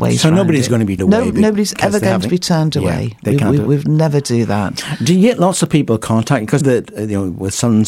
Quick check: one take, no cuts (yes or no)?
no